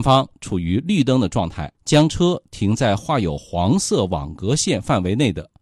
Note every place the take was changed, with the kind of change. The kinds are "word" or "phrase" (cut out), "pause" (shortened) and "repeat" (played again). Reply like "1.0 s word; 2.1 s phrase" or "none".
1.7 s pause